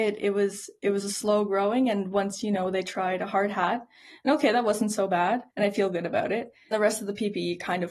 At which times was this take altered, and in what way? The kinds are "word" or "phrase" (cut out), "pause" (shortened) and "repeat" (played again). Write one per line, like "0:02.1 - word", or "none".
0:05.5 - pause
0:06.7 - word

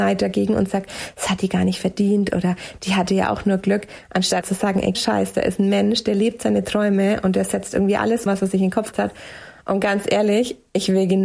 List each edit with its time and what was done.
0:04.4 - word
0:04.9 - word
0:08.3 - word
0:08.9 - word

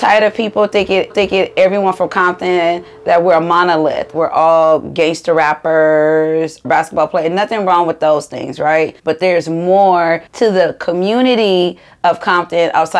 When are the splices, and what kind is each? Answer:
0:01.1 - repeat
0:04.1 - word
0:06.6 - word
0:09.0 - pause
0:10.3 - pause

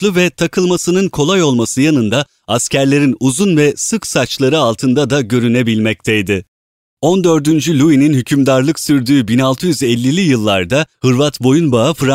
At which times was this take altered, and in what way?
none

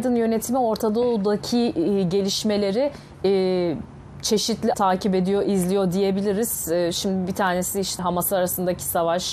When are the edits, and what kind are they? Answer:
0:04.7 - word
0:08.0 - word

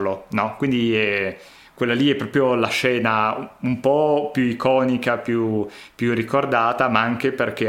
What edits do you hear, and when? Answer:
none

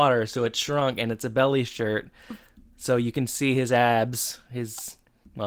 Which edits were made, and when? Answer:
none

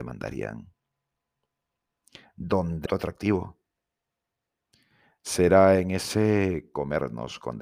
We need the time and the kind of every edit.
0:02.9 - word

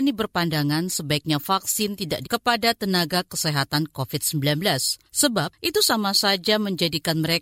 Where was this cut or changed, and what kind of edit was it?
0:02.2 - word

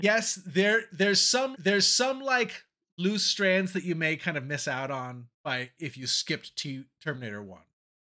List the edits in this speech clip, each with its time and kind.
0:01.5 - repeat
0:05.3 - pause

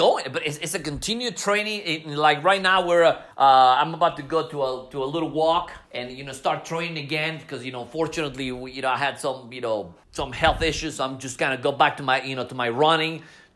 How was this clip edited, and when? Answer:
0:03.3 - pause
0:05.8 - pause
0:10.0 - pause

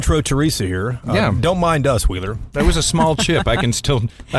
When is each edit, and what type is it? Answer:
none

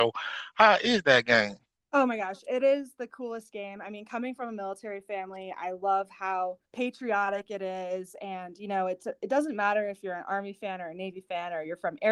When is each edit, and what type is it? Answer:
0:01.7 - pause
0:06.7 - pause

